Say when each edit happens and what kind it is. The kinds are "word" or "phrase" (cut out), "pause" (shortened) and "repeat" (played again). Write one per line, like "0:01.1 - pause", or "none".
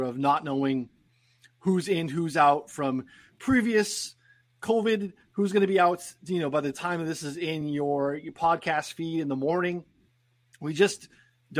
none